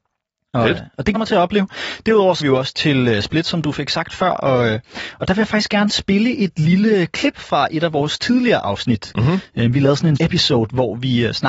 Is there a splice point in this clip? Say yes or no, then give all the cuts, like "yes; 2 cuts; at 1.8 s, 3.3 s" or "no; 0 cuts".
yes; 3 cuts; at 1.2 s, 2.4 s, 10.2 s